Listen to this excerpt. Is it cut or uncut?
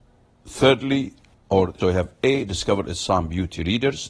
cut